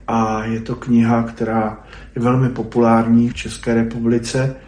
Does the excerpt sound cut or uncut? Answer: cut